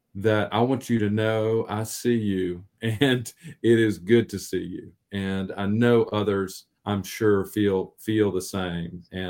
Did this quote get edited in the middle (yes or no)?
yes